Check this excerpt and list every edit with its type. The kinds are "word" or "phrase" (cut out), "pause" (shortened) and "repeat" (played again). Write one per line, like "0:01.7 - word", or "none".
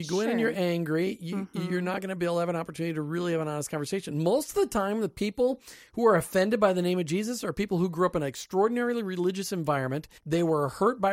0:10.2 - pause